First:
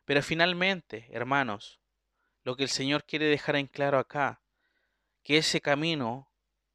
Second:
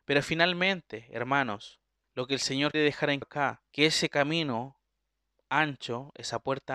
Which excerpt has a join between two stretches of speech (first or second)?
second